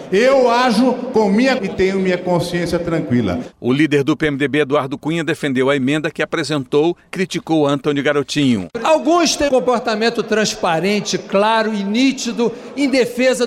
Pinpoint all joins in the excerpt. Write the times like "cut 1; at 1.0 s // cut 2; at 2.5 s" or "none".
cut 1; at 1.6 s // cut 2; at 7.1 s // cut 3; at 9.5 s